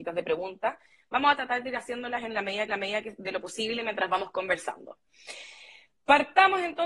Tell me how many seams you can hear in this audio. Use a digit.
1